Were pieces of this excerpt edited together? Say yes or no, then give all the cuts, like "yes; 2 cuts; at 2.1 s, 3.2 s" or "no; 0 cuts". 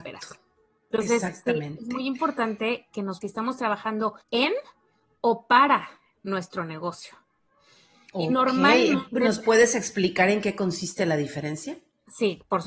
yes; 2 cuts; at 3.2 s, 4.2 s